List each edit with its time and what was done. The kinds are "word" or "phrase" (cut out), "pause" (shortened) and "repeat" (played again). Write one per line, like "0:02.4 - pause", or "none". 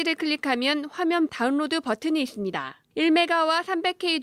0:01.3 - phrase
0:02.8 - pause